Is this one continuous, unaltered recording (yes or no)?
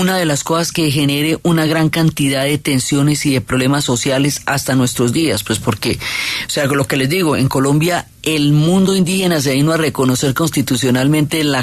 yes